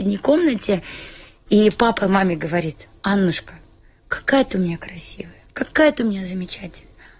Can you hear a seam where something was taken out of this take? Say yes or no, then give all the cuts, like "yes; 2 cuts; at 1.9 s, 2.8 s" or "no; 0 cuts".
no; 0 cuts